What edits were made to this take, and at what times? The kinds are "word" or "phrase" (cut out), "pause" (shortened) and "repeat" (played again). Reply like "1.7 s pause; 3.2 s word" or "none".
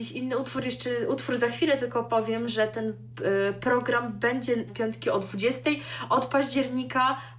4.7 s phrase